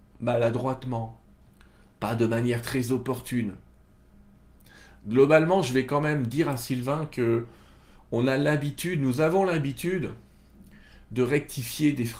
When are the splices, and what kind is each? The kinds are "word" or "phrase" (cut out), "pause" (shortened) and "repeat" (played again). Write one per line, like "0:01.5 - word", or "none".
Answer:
0:01.4 - pause